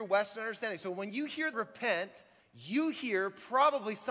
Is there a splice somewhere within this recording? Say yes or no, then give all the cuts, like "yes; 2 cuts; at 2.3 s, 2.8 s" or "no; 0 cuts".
yes; 2 cuts; at 1.5 s, 2.4 s